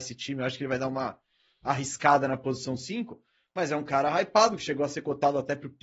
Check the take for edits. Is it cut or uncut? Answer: uncut